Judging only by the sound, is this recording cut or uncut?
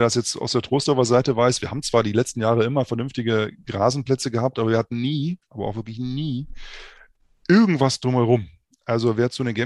uncut